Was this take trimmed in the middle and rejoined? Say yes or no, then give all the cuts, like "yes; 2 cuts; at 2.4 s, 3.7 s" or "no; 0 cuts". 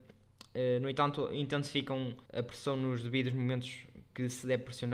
yes; 1 cut; at 2.3 s